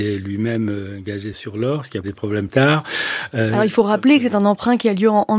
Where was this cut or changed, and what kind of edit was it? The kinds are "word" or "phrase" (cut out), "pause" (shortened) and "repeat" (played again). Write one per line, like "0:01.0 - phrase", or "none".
0:01.3 - word
0:02.0 - word
0:02.5 - word